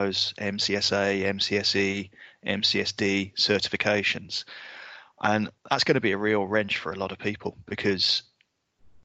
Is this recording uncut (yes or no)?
no